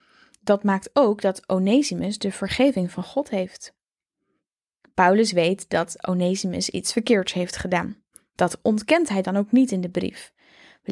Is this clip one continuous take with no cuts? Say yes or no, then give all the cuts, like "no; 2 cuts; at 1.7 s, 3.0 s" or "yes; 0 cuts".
yes; 0 cuts